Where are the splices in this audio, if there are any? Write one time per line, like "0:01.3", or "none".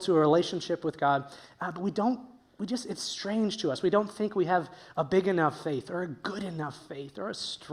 none